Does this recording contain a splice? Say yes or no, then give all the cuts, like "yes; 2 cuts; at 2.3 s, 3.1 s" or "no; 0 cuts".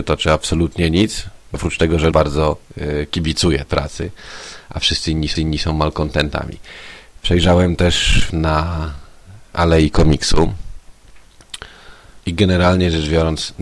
yes; 6 cuts; at 1.5 s, 2.1 s, 3.7 s, 5.3 s, 8.3 s, 12.2 s